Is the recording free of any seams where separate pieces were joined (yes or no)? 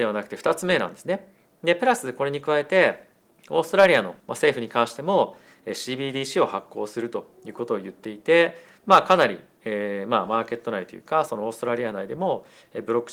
no